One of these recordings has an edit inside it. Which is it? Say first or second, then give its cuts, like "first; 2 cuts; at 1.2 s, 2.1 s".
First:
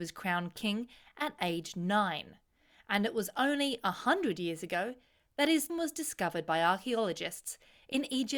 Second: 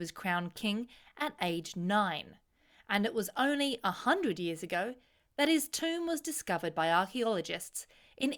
first; 1 cut; at 5.7 s